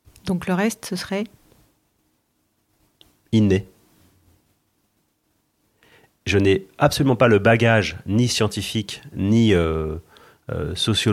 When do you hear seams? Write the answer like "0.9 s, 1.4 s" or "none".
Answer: none